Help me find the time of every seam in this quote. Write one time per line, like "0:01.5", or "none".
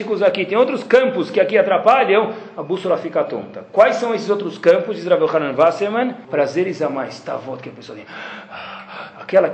0:06.2